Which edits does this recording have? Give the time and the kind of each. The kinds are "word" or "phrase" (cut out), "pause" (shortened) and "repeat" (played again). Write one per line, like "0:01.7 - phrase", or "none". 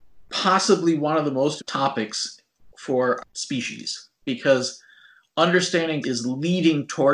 0:01.6 - word
0:03.2 - word
0:06.0 - word